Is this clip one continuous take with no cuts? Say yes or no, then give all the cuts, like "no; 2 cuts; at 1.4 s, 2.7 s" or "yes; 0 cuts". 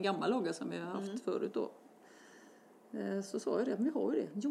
yes; 0 cuts